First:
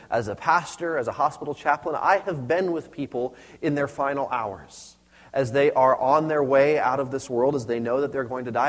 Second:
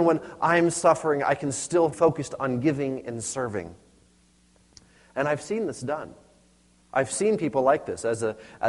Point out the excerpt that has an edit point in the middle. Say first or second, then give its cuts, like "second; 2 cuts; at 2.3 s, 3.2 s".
second; 1 cut; at 1.9 s